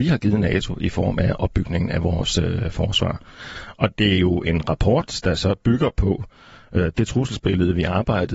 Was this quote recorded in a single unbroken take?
yes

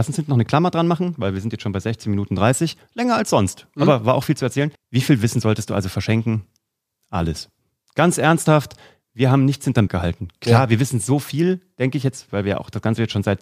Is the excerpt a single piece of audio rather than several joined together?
no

